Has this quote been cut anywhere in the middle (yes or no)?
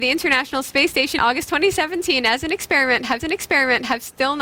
yes